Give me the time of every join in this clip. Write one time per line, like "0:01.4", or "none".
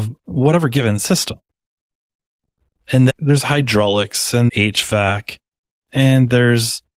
0:03.1
0:04.5